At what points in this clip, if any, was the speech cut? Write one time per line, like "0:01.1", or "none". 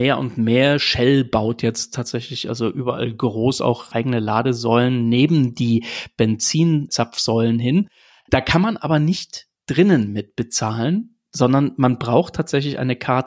none